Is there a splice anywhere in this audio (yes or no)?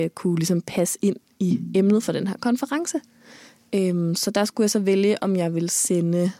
no